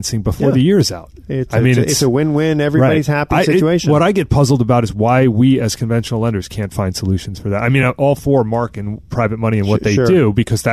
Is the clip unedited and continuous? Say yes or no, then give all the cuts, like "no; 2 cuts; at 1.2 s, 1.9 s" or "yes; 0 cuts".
yes; 0 cuts